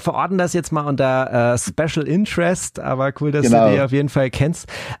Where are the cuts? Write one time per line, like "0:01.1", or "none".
none